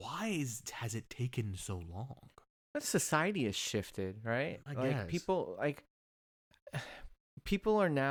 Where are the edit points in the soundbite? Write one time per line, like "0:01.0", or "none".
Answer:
none